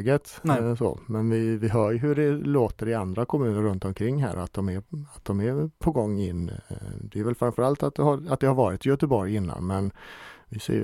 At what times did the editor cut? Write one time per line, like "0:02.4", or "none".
none